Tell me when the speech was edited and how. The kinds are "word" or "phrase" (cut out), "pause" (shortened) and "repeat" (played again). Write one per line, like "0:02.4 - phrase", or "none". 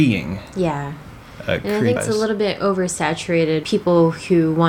0:02.0 - word
0:03.6 - word